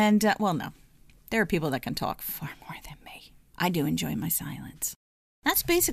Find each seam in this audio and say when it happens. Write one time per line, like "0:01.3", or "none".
none

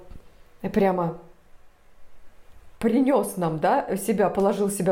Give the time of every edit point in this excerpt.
none

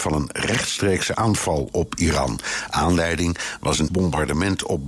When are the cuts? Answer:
0:01.1
0:03.9

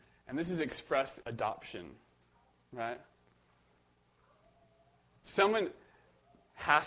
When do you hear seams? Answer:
0:01.2

